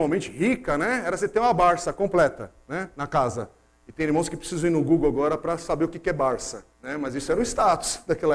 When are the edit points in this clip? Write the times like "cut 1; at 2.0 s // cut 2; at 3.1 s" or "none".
cut 1; at 6.7 s